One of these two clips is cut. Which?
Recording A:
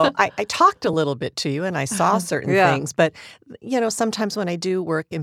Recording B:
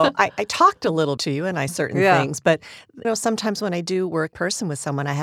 B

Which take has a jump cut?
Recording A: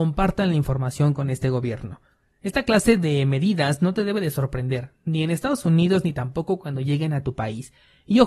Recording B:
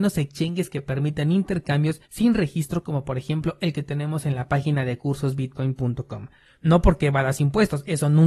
B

